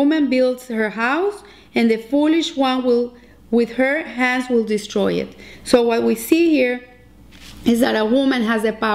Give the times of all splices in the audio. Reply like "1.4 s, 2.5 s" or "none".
none